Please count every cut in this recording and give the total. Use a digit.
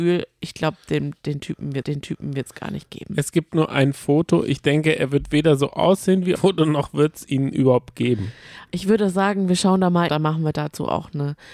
3